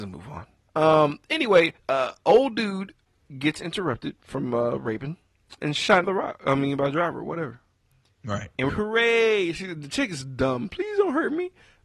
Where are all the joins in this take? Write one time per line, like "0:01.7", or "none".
0:05.6
0:06.0
0:08.7